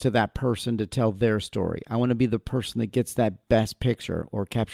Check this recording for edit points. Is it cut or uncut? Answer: uncut